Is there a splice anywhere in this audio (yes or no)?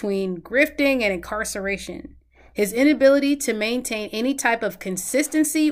no